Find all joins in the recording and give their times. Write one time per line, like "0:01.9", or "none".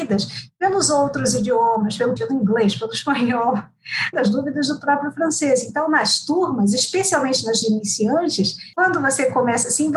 0:02.2
0:04.1
0:07.6
0:08.7